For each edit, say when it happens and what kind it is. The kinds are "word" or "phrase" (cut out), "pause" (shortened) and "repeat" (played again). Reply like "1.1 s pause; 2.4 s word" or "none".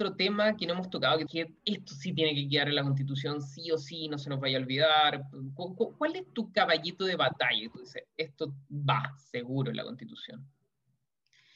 1.3 s phrase